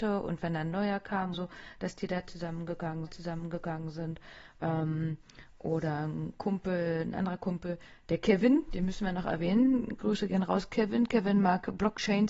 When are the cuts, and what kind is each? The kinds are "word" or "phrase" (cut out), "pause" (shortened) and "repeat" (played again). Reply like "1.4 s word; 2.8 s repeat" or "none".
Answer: 1.3 s word; 3.1 s repeat